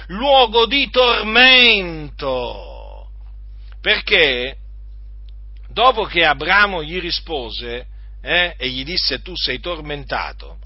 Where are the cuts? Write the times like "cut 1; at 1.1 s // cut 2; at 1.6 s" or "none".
none

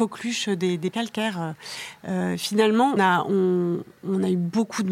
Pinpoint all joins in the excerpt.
cut 1; at 0.9 s // cut 2; at 3.0 s

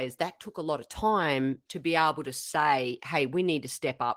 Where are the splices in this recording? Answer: cut 1; at 1.7 s

